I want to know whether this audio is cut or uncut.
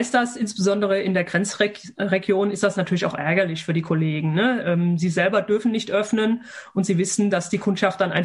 uncut